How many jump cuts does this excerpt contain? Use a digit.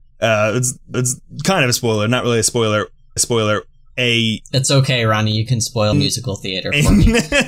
3